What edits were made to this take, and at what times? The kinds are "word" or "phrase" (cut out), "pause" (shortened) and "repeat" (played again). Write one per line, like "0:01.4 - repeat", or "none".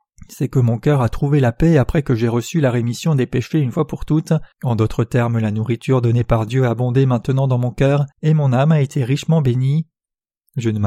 0:04.5 - pause
0:08.1 - pause